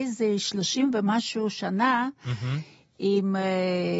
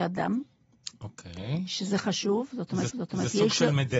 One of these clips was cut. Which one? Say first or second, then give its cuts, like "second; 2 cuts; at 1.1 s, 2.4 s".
second; 1 cut; at 2.9 s